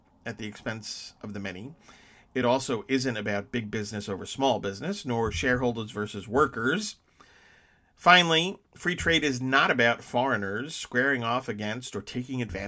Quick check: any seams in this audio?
no; 0 cuts

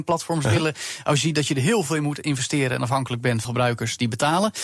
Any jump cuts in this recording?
yes; 1 cut; at 3.4 s

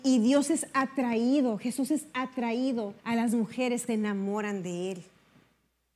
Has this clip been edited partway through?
yes; 2 cuts; at 3.0 s, 3.9 s

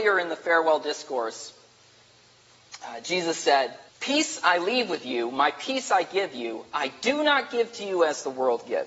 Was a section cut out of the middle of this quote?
yes; 1 cut; at 3.9 s

